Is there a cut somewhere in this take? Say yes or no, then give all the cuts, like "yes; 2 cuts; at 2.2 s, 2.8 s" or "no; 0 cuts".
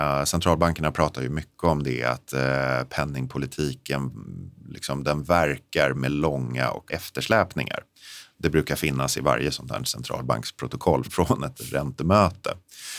yes; 3 cuts; at 2.3 s, 6.9 s, 11.0 s